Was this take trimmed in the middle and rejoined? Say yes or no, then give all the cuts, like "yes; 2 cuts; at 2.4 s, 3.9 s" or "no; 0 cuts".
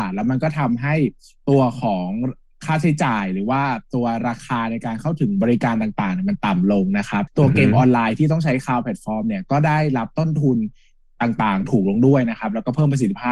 no; 0 cuts